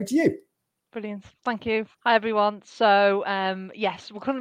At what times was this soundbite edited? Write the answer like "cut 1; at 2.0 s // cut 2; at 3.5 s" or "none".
cut 1; at 1.9 s